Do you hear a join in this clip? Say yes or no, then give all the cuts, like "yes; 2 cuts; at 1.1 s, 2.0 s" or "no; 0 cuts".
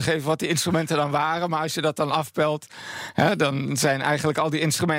no; 0 cuts